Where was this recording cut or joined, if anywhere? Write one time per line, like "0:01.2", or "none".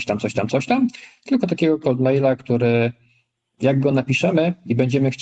none